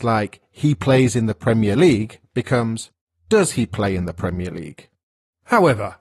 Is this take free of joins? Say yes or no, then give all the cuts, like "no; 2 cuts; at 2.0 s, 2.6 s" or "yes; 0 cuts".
yes; 0 cuts